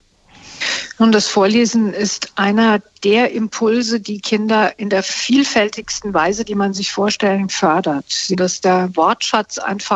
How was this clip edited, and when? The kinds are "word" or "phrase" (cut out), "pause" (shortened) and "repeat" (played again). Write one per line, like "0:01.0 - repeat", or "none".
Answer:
0:07.5 - word

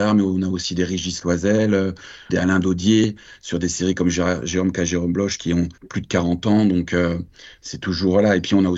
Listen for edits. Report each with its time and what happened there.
0:02.3 - phrase
0:05.8 - pause

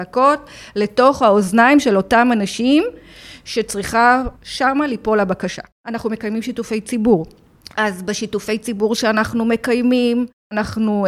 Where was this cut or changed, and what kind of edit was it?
0:04.4 - pause
0:05.7 - pause

